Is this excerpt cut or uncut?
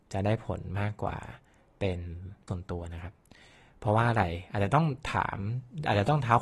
cut